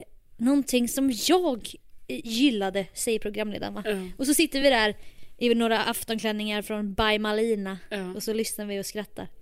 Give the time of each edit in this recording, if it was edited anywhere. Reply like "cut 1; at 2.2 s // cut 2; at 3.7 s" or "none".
none